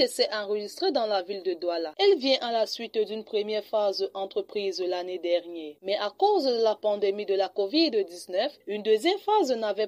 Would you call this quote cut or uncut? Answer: cut